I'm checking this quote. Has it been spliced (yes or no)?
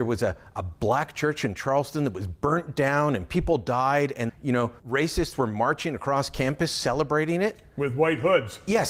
yes